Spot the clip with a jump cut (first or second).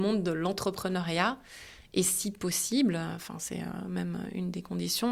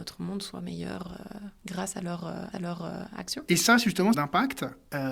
second